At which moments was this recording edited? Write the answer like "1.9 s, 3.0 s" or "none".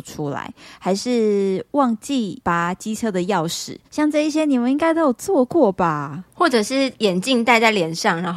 3.8 s